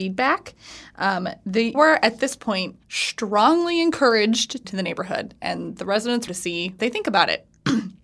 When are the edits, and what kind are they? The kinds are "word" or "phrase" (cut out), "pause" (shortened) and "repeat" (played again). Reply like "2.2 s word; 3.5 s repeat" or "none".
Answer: 1.7 s word; 2.8 s pause; 4.6 s phrase; 6.3 s word; 6.8 s word